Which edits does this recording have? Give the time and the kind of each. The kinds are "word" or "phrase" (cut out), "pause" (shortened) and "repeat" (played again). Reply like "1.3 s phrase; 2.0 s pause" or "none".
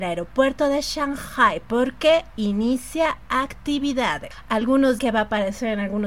5.0 s word